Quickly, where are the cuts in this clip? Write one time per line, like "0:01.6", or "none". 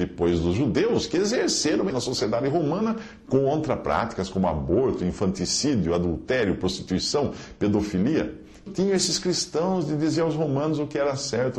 0:01.9
0:08.7